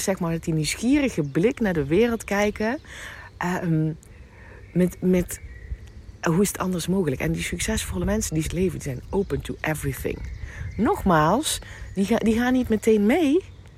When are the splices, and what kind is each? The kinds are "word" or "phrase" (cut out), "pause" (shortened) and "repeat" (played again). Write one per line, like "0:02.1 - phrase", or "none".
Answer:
0:08.4 - phrase